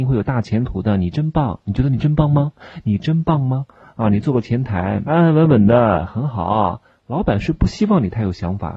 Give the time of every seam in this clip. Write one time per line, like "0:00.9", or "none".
0:05.0